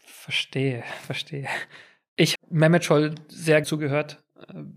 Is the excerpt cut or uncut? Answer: cut